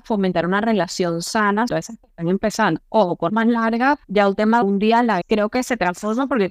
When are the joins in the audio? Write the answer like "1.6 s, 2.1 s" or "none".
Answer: 1.7 s, 3.3 s, 4.0 s, 4.6 s, 5.2 s